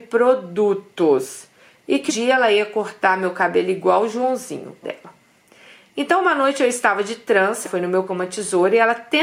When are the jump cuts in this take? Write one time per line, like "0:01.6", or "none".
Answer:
0:02.1
0:04.8
0:07.6
0:08.1